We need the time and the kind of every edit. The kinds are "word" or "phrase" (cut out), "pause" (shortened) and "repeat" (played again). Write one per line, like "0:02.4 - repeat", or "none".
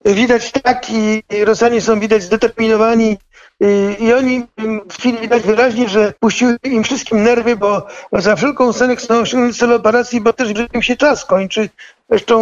0:05.0 - word
0:06.2 - pause
0:10.5 - word

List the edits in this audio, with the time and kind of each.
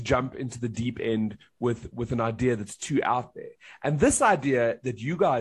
none

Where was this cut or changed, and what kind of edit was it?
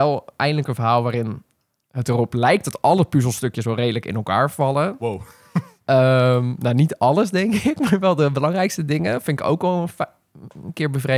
none

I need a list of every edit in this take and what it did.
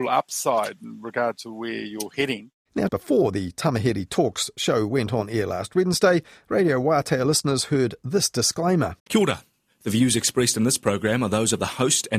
0:02.9 - word
0:09.0 - pause

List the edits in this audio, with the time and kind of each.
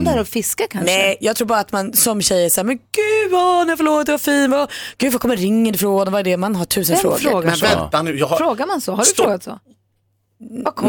none

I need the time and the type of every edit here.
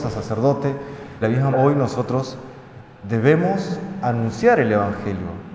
0:01.2 - word
0:01.5 - word

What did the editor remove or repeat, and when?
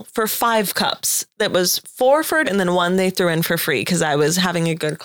0:01.3 - pause
0:02.4 - word

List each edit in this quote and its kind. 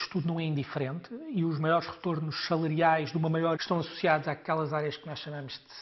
0:03.6 - word

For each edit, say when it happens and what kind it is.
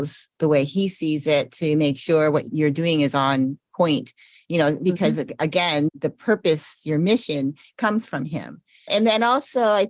none

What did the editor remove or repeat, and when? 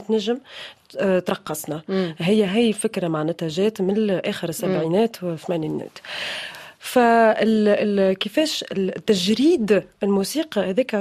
none

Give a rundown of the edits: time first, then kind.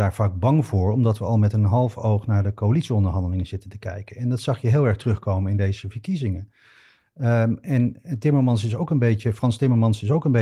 none

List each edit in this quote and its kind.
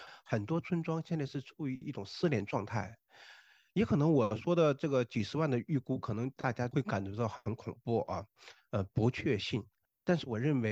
none

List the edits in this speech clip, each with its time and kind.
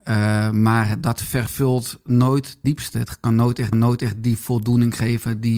0:02.6 - word
0:03.7 - repeat

